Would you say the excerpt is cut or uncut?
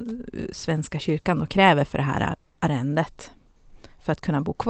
uncut